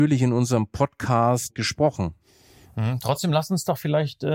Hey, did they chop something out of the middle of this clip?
no; 0 cuts

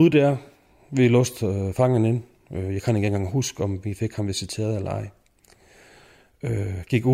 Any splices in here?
no; 0 cuts

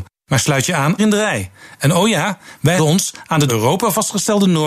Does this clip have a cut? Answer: yes; 3 cuts; at 1.0 s, 2.8 s, 3.5 s

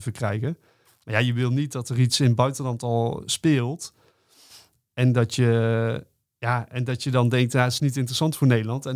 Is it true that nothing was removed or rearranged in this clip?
no; 1 cut; at 7.8 s

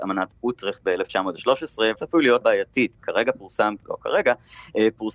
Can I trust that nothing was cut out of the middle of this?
no; 4 cuts; at 2.0 s, 2.4 s, 3.0 s, 3.8 s

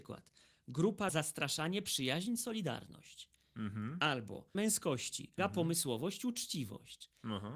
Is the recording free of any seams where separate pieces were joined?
no; 3 cuts; at 1.1 s, 4.5 s, 5.4 s

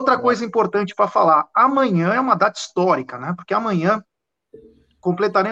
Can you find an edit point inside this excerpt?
no; 0 cuts

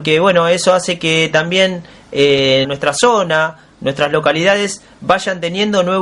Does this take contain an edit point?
yes; 1 cut; at 2.6 s

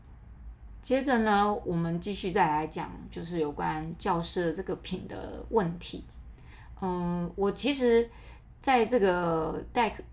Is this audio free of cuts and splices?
no; 1 cut; at 1.6 s

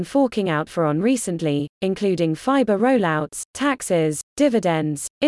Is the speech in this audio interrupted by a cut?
no; 0 cuts

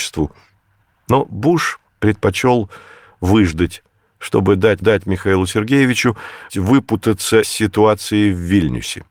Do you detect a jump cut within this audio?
yes; 4 cuts; at 1.9 s, 4.8 s, 6.5 s, 7.4 s

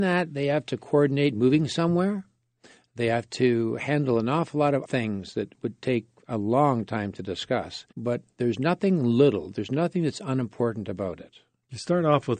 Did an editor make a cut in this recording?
yes; 2 cuts; at 4.8 s, 7.9 s

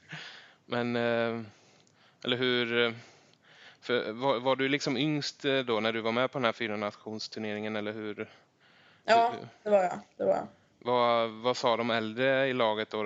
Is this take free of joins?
yes; 0 cuts

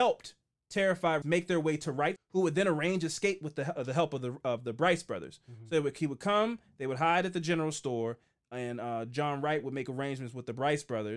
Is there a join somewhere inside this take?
yes; 3 cuts; at 1.2 s, 2.2 s, 3.8 s

